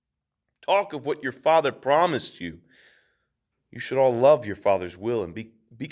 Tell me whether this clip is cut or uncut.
uncut